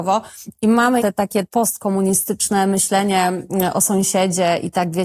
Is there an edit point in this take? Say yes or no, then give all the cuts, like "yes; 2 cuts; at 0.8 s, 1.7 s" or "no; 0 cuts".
yes; 2 cuts; at 1.0 s, 1.4 s